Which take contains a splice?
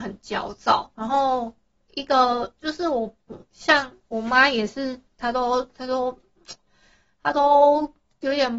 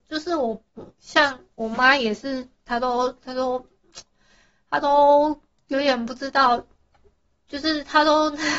first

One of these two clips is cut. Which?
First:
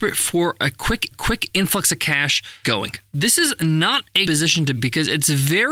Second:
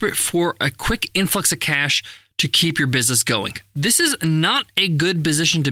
first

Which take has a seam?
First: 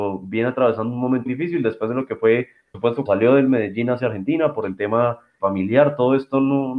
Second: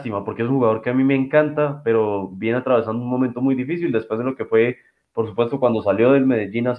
first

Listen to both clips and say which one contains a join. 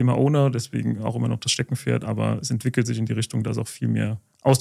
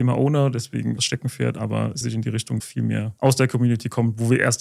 second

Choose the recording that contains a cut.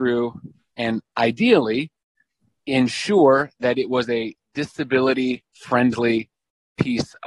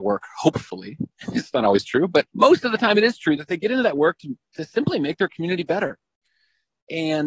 second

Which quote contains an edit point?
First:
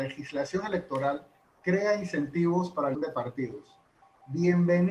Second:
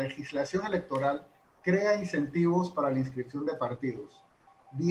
first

